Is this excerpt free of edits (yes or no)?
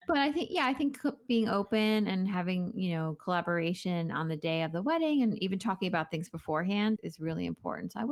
no